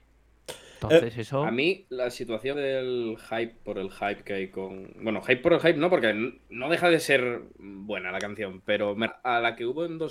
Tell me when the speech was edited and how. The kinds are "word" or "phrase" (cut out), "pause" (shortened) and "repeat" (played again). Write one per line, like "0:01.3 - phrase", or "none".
0:01.9 - word
0:02.5 - word
0:09.1 - word

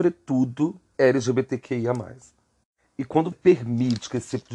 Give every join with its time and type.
0:00.9 - word
0:03.3 - word

